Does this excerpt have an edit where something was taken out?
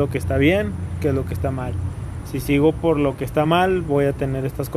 no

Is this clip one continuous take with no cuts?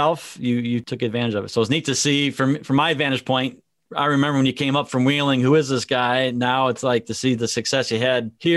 yes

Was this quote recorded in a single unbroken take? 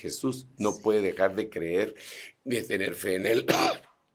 yes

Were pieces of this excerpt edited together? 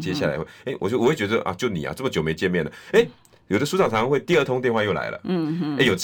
no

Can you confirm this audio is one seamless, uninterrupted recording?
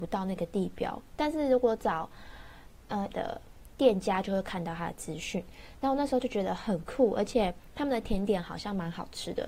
no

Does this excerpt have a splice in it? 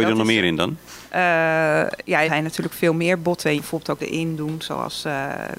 yes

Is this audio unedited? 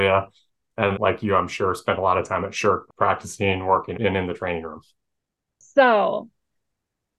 no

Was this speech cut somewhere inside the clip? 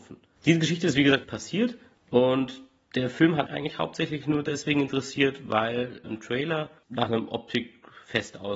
yes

